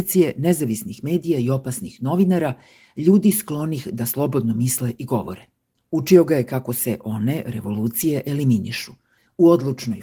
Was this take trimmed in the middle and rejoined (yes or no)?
no